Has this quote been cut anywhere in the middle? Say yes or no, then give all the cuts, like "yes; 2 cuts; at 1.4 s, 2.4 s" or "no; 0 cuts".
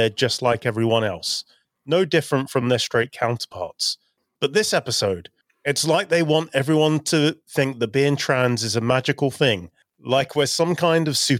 no; 0 cuts